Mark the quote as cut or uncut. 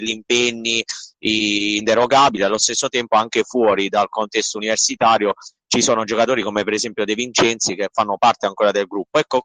uncut